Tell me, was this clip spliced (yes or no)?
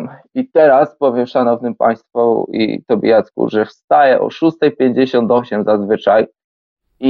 no